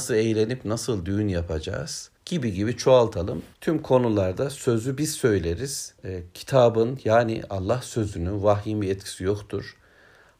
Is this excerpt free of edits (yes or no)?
no